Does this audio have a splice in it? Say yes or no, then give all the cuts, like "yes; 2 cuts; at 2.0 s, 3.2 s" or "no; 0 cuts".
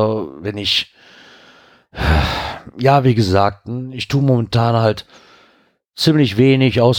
no; 0 cuts